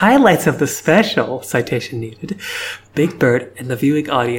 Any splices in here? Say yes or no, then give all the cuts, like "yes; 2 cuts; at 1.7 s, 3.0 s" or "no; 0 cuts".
no; 0 cuts